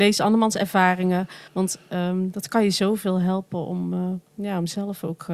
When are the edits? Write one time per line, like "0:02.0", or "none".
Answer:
0:01.5